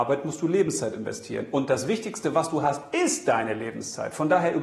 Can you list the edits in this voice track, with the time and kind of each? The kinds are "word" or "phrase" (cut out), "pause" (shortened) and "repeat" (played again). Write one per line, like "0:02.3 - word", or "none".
none